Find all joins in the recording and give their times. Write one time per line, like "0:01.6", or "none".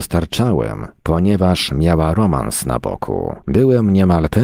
0:03.4